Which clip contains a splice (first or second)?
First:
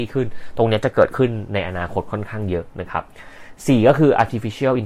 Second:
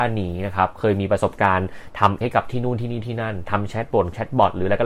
second